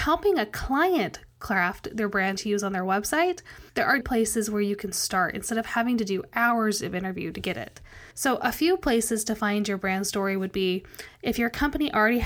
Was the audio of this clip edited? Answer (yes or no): yes